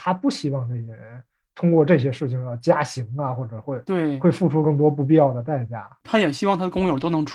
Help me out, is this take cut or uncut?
uncut